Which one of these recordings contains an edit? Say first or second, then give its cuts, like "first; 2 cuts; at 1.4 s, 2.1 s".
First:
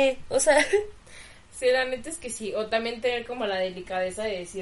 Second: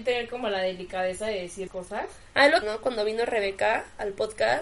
second; 2 cuts; at 1.7 s, 2.6 s